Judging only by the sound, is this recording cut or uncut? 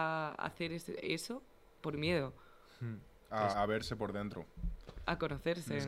cut